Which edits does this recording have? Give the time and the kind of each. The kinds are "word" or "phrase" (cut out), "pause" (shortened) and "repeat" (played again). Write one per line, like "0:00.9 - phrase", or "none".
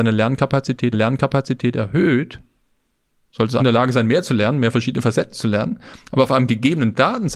0:00.9 - repeat
0:03.6 - word